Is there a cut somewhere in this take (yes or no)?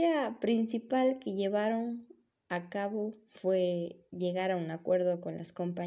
no